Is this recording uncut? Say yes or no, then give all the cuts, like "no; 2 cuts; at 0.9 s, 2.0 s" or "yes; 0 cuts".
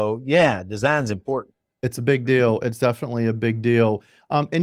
yes; 0 cuts